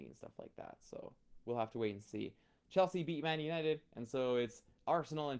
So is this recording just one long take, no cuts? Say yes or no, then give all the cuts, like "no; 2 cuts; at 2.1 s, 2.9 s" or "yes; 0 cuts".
yes; 0 cuts